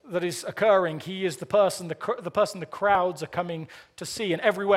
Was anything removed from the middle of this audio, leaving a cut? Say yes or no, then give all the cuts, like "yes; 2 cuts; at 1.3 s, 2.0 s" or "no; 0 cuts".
no; 0 cuts